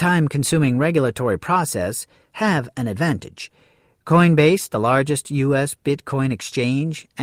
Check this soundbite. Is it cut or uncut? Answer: uncut